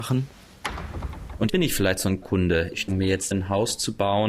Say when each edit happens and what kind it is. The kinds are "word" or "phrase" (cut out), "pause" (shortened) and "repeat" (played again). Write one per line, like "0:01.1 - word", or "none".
0:01.5 - word
0:02.2 - word
0:02.9 - word
0:03.3 - word